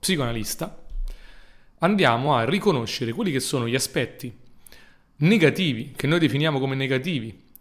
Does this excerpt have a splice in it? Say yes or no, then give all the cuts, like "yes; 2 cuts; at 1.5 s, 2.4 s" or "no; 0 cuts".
no; 0 cuts